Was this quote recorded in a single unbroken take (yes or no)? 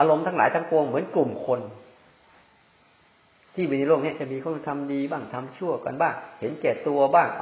yes